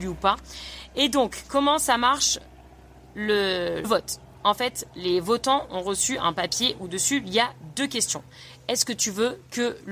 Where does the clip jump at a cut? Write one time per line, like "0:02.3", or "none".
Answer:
0:03.8